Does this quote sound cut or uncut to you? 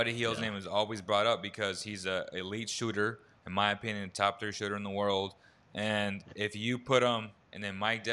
uncut